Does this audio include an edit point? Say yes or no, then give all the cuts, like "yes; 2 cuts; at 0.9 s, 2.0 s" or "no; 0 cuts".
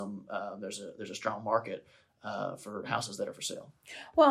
no; 0 cuts